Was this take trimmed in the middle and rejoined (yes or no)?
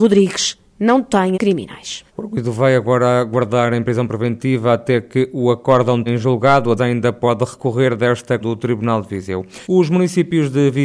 yes